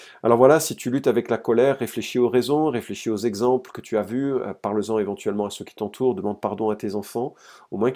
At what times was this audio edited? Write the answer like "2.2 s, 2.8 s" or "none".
none